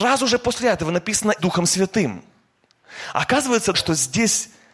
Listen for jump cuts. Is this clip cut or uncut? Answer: cut